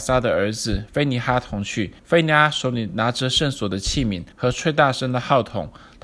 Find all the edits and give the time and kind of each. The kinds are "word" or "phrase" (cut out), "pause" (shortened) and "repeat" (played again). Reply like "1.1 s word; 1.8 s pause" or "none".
2.0 s pause; 4.3 s pause